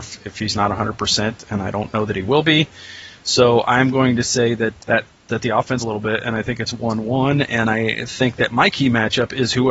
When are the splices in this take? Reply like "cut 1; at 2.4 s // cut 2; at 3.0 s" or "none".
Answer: cut 1; at 4.8 s // cut 2; at 5.8 s